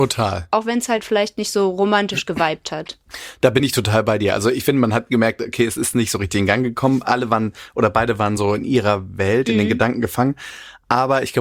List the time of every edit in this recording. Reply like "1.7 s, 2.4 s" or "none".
none